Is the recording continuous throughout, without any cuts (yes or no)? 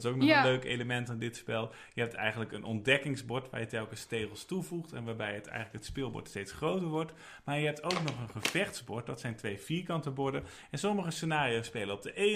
yes